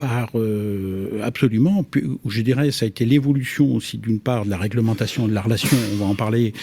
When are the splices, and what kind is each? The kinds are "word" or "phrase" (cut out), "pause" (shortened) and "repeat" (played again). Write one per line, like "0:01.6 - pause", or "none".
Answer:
none